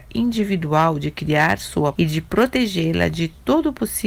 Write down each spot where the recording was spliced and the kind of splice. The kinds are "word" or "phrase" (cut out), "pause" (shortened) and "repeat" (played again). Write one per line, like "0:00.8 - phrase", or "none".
0:02.0 - word